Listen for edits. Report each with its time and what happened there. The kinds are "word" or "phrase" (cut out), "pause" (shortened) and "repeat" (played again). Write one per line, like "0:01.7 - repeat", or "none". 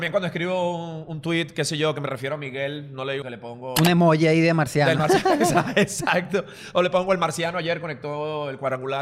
0:03.2 - phrase